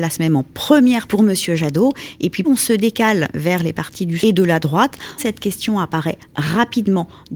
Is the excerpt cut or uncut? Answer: cut